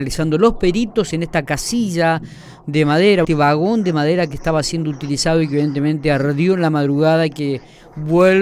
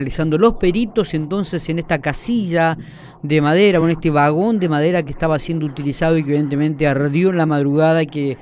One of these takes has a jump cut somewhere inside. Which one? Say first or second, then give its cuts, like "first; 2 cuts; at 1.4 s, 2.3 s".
first; 2 cuts; at 1.1 s, 3.2 s